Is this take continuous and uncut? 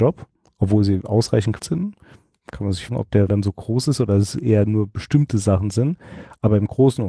no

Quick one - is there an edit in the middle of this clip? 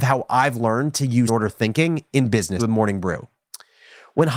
yes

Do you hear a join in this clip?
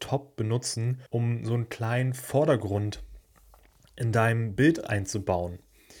yes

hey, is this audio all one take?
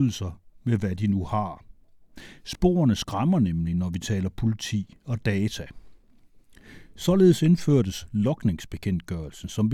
yes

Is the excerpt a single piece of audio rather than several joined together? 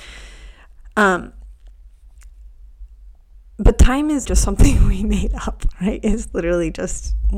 no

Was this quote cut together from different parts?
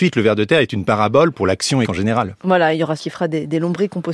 yes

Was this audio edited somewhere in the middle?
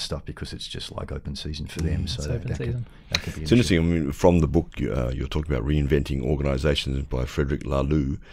no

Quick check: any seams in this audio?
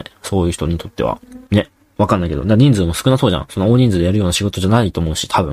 yes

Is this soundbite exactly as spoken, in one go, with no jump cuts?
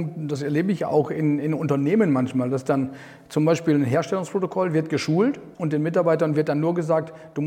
no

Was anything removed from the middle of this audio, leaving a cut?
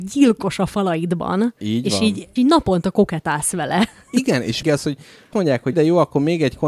yes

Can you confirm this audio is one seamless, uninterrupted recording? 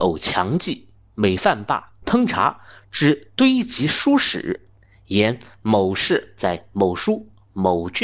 no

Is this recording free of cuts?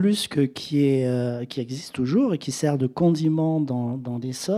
yes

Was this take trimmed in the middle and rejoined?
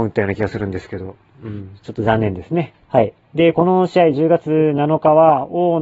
yes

